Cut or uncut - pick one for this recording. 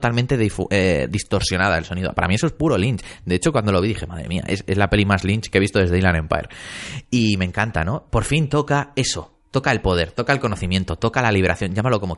uncut